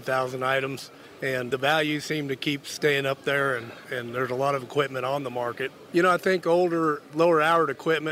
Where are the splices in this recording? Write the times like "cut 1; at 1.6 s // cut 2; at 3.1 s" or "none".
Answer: none